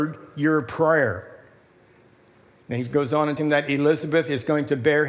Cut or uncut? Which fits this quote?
cut